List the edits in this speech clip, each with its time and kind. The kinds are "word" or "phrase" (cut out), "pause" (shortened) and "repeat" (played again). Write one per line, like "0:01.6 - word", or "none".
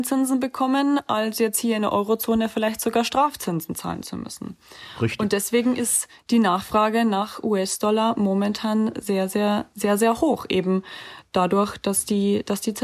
none